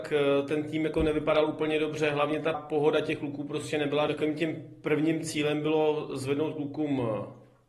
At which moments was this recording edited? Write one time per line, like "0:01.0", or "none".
0:02.5
0:04.1